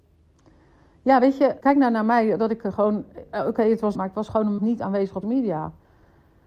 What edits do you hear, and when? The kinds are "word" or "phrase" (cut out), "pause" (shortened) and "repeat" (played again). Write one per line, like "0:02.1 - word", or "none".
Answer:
0:01.6 - word
0:03.9 - word
0:04.6 - word
0:05.2 - word